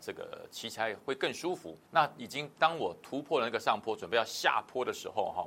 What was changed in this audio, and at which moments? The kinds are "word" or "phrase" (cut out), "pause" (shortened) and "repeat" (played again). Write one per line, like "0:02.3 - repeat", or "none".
0:01.8 - pause